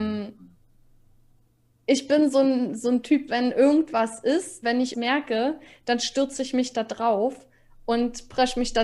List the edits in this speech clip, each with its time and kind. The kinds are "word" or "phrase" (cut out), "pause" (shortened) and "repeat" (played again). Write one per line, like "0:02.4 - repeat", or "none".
0:03.3 - word
0:04.6 - word
0:04.9 - word